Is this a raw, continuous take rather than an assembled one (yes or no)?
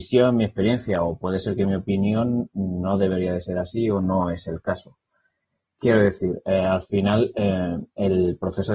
yes